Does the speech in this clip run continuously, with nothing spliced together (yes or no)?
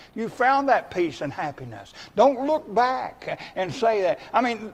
yes